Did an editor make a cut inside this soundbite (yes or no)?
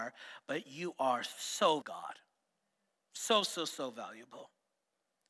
yes